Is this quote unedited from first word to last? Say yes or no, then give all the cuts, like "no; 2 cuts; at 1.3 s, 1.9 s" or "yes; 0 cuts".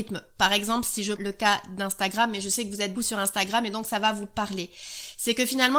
no; 2 cuts; at 1.1 s, 2.9 s